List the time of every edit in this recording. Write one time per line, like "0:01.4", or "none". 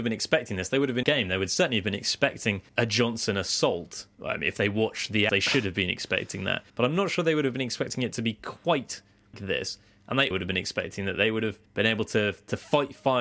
0:01.0
0:02.7
0:04.1
0:05.3
0:06.7
0:09.3
0:10.3
0:11.7